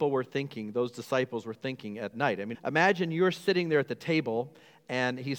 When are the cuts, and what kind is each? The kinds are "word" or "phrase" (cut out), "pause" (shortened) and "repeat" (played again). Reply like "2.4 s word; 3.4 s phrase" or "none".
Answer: 2.1 s word; 2.5 s word